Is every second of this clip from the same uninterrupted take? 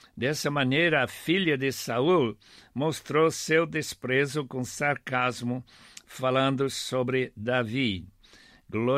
yes; 0 cuts

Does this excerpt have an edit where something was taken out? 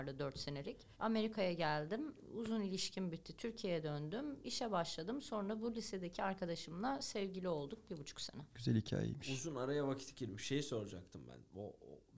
yes; 2 cuts; at 0.9 s, 8.5 s

